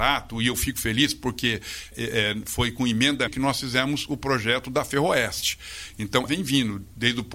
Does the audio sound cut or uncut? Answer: cut